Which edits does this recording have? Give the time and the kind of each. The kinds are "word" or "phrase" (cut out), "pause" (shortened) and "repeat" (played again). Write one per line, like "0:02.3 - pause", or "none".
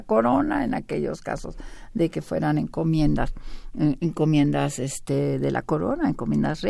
none